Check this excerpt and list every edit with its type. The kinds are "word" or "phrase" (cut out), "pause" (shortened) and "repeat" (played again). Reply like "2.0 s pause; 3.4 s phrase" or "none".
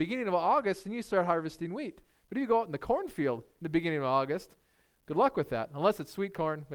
none